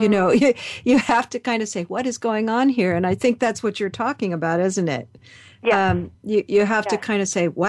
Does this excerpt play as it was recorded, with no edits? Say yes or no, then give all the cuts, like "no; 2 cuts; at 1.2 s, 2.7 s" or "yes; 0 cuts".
yes; 0 cuts